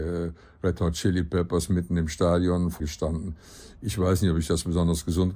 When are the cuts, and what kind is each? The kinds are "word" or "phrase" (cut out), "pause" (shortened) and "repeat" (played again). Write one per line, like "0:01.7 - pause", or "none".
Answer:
0:02.8 - phrase